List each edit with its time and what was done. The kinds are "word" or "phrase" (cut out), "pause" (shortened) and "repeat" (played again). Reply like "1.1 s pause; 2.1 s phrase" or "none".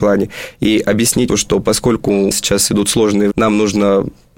1.3 s word; 2.3 s word; 3.3 s word